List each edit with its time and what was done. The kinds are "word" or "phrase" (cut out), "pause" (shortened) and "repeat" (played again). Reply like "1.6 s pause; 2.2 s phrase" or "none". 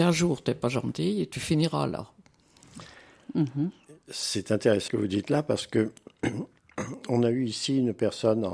4.9 s word